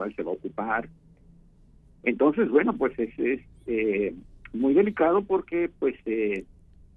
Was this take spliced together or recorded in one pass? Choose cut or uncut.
uncut